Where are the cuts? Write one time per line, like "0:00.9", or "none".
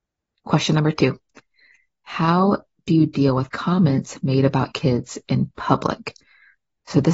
0:04.7